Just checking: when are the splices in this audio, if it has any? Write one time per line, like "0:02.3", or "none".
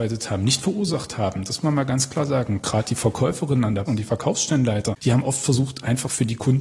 0:01.6
0:03.9